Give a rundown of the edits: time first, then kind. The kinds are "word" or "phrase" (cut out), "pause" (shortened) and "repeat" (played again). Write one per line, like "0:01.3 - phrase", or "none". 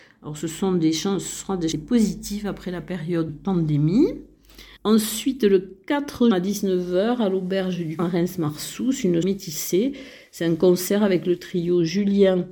0:01.7 - phrase
0:03.3 - word
0:04.8 - pause
0:06.3 - word
0:08.0 - phrase
0:09.2 - word